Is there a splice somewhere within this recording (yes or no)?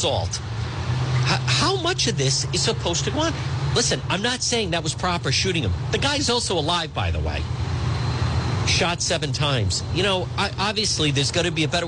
no